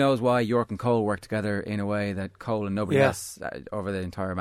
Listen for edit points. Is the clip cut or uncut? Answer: uncut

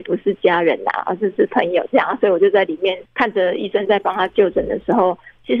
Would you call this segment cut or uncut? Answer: cut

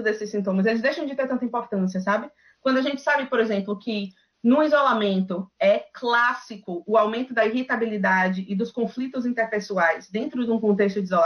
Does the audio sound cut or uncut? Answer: uncut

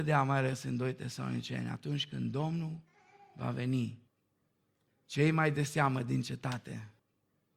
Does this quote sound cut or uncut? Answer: uncut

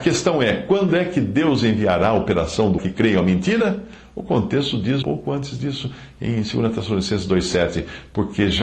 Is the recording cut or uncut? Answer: cut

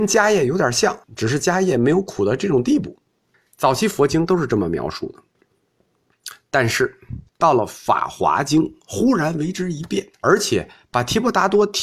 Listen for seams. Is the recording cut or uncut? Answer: cut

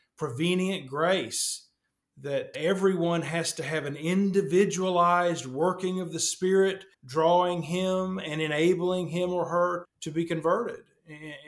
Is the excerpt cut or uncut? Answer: cut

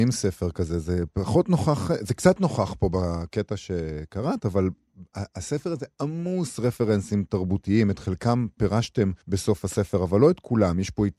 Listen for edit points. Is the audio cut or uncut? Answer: cut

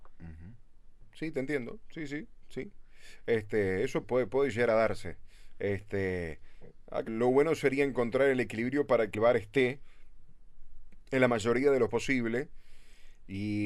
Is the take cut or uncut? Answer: cut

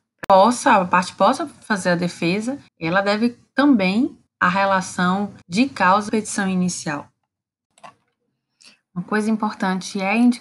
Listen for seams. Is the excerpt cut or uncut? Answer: cut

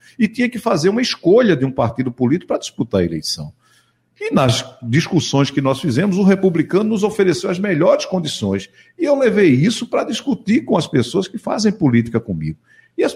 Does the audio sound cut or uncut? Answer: uncut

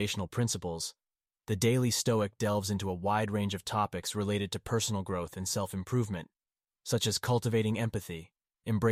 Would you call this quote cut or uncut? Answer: uncut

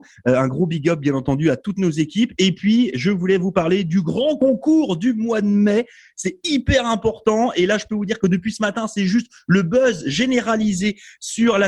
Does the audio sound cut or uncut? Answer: uncut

